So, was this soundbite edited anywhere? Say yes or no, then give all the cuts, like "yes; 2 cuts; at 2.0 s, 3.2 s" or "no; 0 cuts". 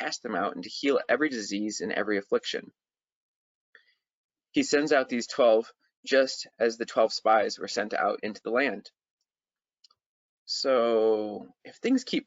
no; 0 cuts